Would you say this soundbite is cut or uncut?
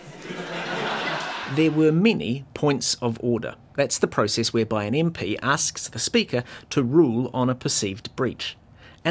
uncut